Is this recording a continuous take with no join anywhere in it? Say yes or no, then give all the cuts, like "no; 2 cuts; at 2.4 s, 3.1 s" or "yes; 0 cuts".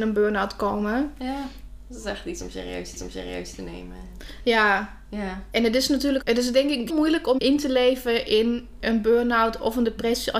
no; 4 cuts; at 3.0 s, 6.2 s, 6.9 s, 7.4 s